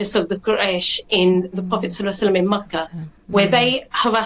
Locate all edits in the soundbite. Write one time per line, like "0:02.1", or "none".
0:01.5